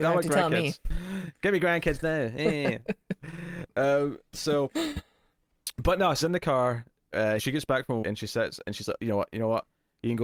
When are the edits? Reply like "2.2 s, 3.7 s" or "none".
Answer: 6.2 s, 7.4 s, 8.0 s